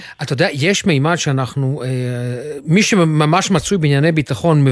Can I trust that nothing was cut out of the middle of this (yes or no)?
yes